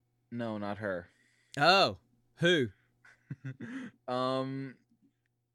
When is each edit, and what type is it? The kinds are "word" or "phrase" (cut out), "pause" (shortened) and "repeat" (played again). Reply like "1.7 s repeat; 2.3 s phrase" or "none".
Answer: none